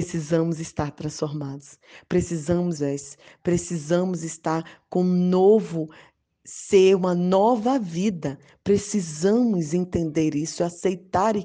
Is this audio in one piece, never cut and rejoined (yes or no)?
no